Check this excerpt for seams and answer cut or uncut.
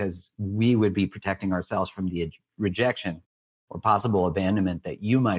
uncut